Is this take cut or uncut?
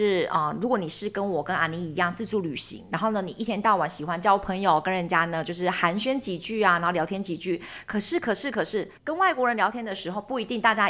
cut